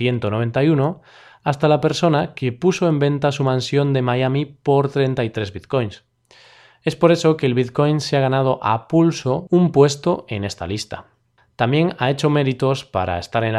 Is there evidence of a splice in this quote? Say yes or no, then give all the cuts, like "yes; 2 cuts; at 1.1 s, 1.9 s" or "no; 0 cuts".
no; 0 cuts